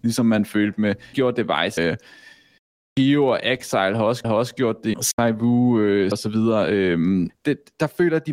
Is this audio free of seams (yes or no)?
no